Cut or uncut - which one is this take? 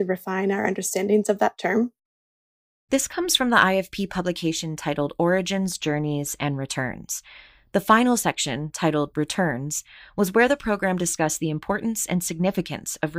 uncut